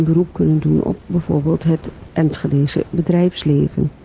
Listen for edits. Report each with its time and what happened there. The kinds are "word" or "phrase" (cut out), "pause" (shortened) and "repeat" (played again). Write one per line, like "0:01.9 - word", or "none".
none